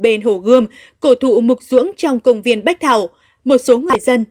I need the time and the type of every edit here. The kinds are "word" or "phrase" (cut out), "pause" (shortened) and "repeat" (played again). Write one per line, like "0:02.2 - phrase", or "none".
none

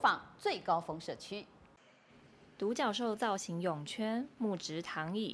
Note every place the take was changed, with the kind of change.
none

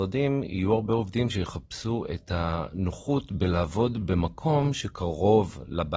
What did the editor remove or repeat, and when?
none

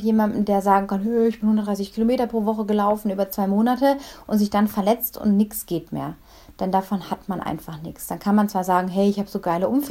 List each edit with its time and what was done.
none

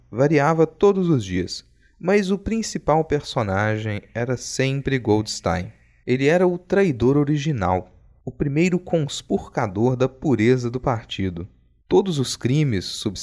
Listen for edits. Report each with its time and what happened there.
none

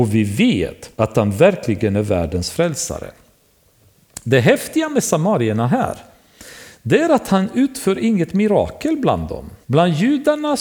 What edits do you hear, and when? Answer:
0:00.9 - pause
0:09.6 - pause

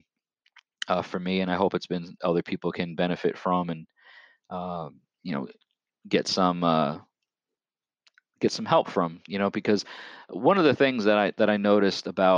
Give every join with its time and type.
0:02.2 - phrase

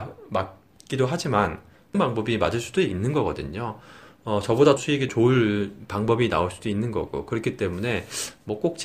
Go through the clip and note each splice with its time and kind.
0:01.9 - word
0:04.8 - word
0:05.1 - word

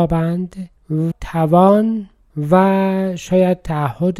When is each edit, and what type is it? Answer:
0:01.1 - word

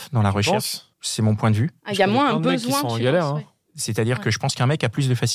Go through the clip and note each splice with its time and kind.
0:00.9 - pause

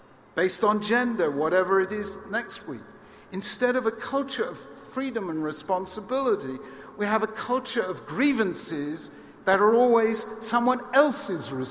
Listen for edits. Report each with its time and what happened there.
none

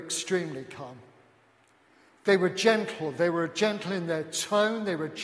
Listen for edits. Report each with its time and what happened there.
none

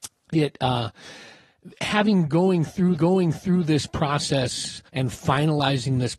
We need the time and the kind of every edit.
0:03.0 - repeat
0:04.9 - pause

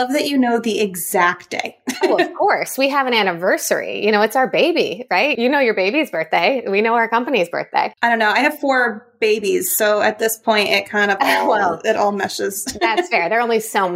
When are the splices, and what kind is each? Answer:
0:08.0 - pause

